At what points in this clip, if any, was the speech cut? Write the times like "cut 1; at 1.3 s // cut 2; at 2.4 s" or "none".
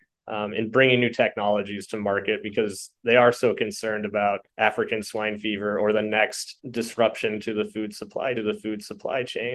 cut 1; at 4.5 s // cut 2; at 6.6 s // cut 3; at 8.4 s